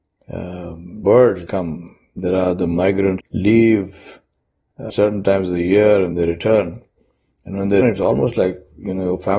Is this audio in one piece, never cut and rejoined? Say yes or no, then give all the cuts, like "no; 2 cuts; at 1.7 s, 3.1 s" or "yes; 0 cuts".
no; 6 cuts; at 1.0 s, 1.5 s, 3.2 s, 4.9 s, 6.1 s, 7.8 s